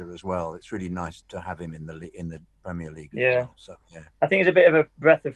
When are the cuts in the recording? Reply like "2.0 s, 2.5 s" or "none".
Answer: 1.2 s, 3.8 s